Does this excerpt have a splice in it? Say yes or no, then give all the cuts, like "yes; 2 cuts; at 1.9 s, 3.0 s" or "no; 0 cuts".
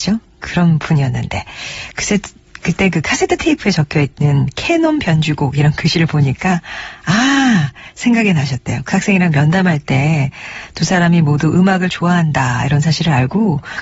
no; 0 cuts